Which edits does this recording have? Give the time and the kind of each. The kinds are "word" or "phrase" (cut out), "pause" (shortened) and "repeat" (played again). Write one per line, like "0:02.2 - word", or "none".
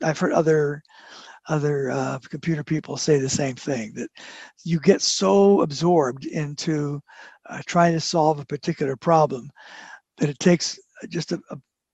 none